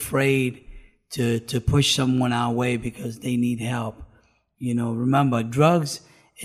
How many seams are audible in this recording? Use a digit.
0